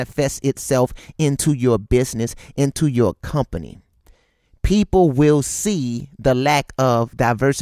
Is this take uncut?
yes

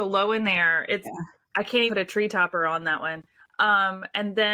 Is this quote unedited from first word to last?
no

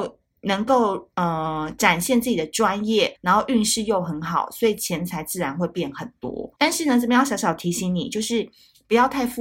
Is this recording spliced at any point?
yes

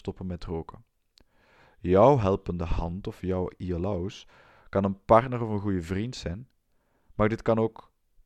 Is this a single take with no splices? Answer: yes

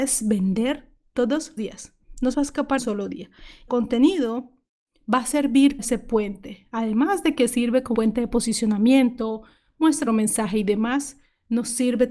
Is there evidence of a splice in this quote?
yes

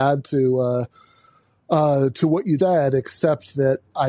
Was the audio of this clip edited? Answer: yes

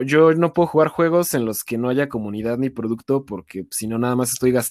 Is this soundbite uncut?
yes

